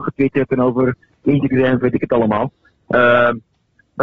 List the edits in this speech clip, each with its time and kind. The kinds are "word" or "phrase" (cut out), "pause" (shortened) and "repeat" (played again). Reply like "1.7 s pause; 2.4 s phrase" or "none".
1.8 s word